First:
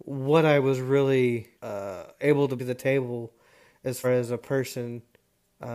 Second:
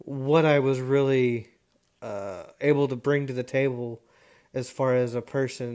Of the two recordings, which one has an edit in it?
first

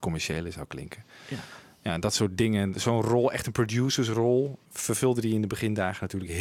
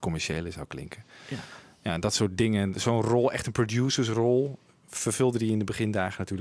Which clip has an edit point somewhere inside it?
first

